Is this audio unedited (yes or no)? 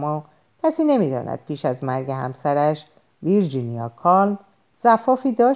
yes